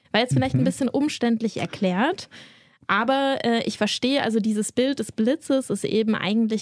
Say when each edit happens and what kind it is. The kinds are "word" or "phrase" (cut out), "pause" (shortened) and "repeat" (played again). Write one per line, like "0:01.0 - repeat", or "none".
none